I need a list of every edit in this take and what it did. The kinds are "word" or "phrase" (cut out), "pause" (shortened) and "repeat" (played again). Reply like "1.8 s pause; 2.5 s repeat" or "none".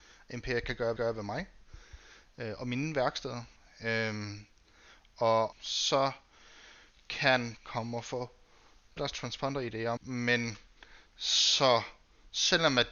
1.0 s repeat; 3.6 s pause; 5.5 s word; 7.6 s word; 9.0 s word; 10.0 s word